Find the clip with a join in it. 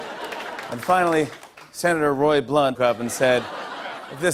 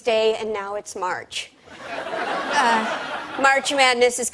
first; 1 cut; at 2.7 s

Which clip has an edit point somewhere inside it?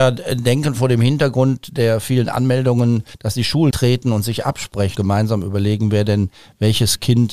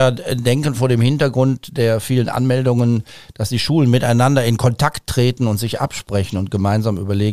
first; 3 cuts; at 3.1 s, 3.7 s, 5.0 s

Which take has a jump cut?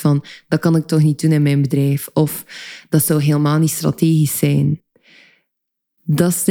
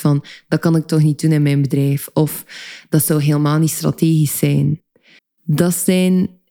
second; 1 cut; at 5.2 s

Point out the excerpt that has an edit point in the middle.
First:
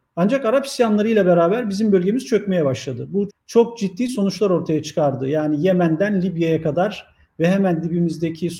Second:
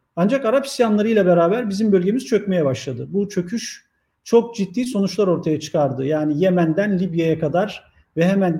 first; 1 cut; at 3.3 s

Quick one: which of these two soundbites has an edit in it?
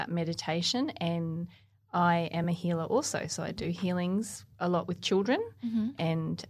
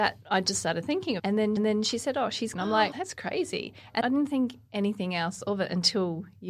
second; 5 cuts; at 1.2 s, 1.6 s, 2.5 s, 2.9 s, 4.0 s

